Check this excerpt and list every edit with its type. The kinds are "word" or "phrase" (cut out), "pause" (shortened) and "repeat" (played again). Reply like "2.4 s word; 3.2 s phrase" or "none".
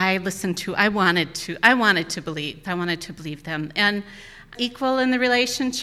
4.5 s phrase